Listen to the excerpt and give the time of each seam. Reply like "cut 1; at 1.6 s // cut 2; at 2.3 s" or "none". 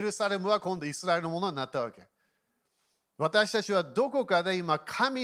none

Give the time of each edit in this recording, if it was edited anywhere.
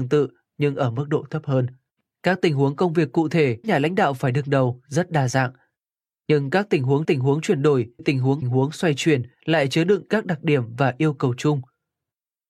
cut 1; at 2.0 s // cut 2; at 3.6 s // cut 3; at 7.0 s // cut 4; at 8.0 s // cut 5; at 8.4 s // cut 6; at 9.4 s

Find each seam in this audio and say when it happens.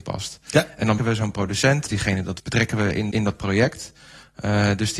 cut 1; at 1.0 s // cut 2; at 1.9 s // cut 3; at 2.4 s // cut 4; at 3.1 s

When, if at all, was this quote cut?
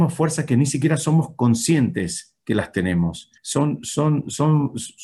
cut 1; at 3.4 s

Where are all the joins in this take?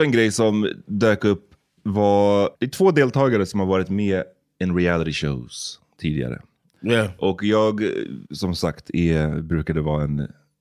cut 1; at 2.5 s // cut 2; at 8.3 s

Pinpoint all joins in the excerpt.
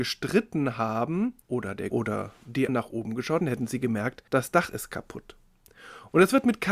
cut 1; at 1.4 s // cut 2; at 1.9 s // cut 3; at 2.7 s // cut 4; at 3.4 s // cut 5; at 4.3 s

